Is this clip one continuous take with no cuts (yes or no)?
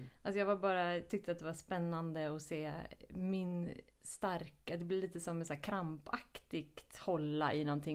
yes